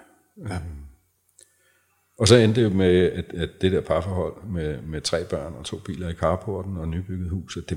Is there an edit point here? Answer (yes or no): no